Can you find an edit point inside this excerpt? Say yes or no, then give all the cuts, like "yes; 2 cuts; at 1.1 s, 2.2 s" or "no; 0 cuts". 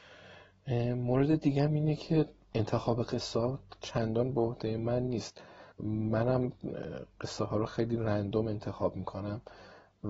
yes; 1 cut; at 5.7 s